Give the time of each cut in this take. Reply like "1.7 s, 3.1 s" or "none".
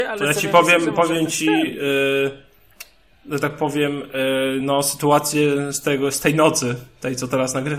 none